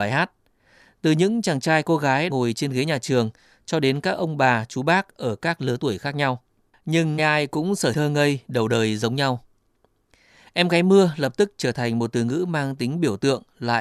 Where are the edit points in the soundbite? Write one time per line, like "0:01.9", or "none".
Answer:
0:02.3
0:07.2
0:07.9